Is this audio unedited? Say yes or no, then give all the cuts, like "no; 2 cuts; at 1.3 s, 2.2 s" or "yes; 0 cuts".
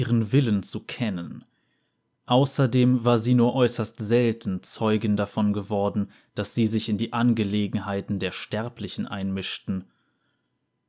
yes; 0 cuts